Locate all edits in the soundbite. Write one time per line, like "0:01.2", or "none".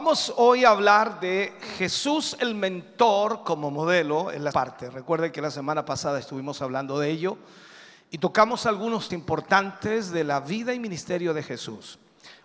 0:04.5
0:09.1